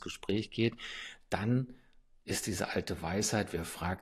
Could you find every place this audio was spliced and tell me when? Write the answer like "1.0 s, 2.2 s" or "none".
none